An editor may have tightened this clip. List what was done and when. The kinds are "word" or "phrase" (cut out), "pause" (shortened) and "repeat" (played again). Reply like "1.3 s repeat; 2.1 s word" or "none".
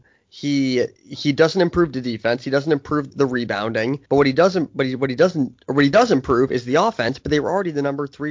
1.0 s pause; 3.1 s word; 4.1 s pause